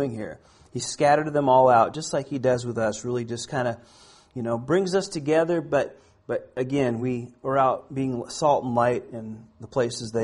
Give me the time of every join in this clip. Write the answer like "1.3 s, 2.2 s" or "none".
none